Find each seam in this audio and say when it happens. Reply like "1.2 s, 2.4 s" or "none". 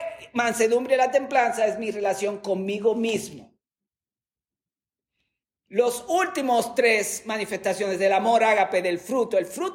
none